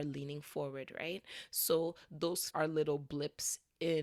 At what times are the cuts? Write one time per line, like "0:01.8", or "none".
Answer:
0:02.5